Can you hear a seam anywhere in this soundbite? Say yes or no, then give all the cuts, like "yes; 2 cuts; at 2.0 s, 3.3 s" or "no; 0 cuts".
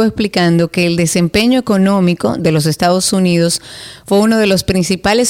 no; 0 cuts